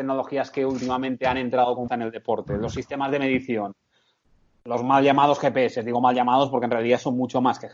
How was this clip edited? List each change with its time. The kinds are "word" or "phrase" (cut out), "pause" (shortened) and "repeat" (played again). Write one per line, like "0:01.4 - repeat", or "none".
0:01.9 - word